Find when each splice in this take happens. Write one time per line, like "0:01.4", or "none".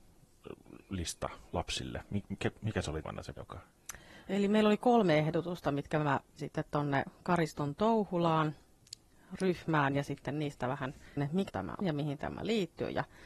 0:03.0
0:03.3
0:06.4
0:11.2
0:11.5
0:11.8